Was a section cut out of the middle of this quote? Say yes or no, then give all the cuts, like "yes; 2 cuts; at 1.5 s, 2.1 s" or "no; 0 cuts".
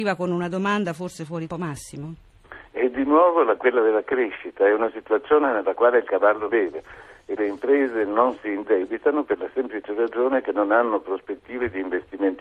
yes; 4 cuts; at 1.5 s, 3.6 s, 6.5 s, 7.4 s